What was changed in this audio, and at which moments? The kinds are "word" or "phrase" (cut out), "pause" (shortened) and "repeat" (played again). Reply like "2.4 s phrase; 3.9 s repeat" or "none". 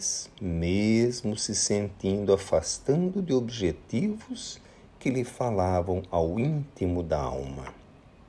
none